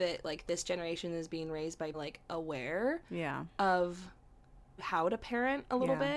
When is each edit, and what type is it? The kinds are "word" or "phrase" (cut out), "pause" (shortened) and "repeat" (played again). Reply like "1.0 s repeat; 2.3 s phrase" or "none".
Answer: 1.9 s phrase; 3.0 s pause; 4.8 s phrase